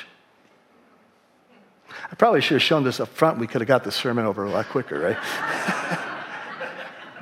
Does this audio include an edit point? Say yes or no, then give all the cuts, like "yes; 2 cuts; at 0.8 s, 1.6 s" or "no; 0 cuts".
no; 0 cuts